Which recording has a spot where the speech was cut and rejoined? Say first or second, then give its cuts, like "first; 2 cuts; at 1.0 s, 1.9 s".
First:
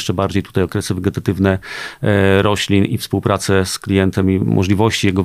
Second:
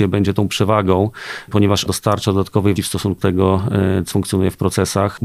second; 4 cuts; at 1.9 s, 2.8 s, 3.2 s, 4.1 s